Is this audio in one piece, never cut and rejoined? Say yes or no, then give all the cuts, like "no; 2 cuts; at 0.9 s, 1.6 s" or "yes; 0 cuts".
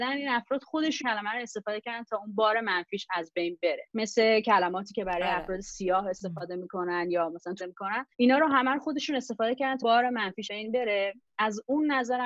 no; 6 cuts; at 1.0 s, 3.9 s, 7.6 s, 8.1 s, 9.8 s, 10.5 s